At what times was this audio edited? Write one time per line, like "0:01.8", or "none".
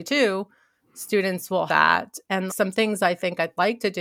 0:01.7
0:02.5